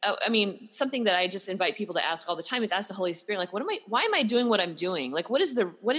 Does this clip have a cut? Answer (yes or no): no